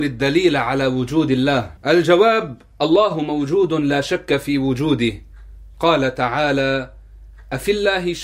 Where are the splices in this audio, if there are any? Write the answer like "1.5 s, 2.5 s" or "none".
1.8 s